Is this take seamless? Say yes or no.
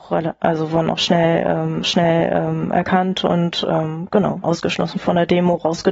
no